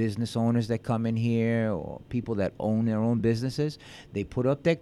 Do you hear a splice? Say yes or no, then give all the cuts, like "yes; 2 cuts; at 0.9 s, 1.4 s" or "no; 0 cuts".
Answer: no; 0 cuts